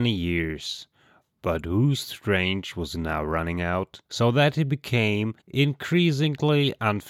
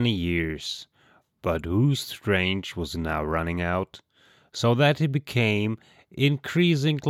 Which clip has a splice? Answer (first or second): first